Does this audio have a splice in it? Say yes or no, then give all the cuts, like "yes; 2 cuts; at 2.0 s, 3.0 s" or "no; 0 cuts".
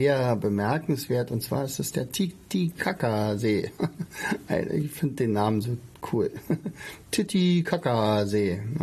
no; 0 cuts